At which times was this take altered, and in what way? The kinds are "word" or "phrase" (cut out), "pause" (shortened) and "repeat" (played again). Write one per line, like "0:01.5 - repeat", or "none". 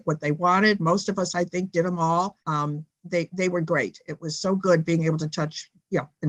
0:02.4 - pause